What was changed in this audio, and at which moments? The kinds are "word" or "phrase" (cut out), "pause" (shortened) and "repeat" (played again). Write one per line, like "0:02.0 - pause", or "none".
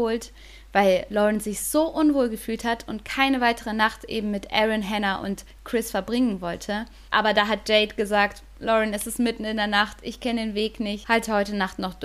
none